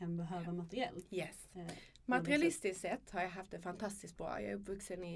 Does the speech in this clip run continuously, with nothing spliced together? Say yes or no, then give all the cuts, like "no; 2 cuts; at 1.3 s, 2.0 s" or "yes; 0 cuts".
yes; 0 cuts